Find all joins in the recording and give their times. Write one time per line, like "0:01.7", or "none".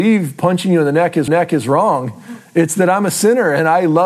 0:01.3

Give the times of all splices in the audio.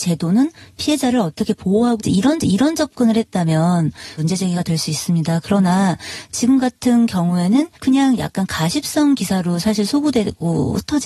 0:02.0
0:02.4
0:04.2
0:07.7

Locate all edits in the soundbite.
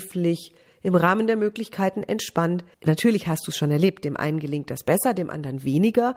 0:02.7

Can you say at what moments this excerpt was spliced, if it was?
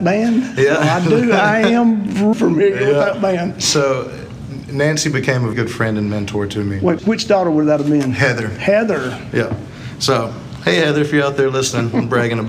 0:02.3
0:05.5
0:07.0

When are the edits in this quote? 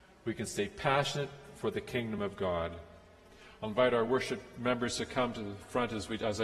none

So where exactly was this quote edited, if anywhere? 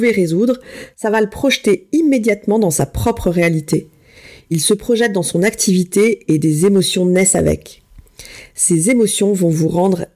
none

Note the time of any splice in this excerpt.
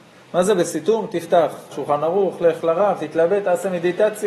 0:01.7

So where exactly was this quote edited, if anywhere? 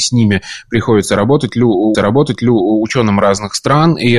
0:01.9

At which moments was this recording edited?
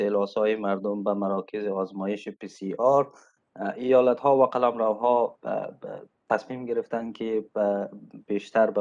none

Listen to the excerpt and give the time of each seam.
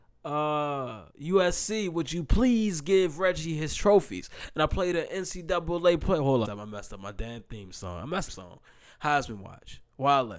0:01.1
0:06.4
0:08.3

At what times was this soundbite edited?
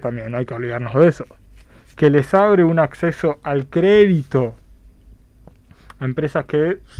none

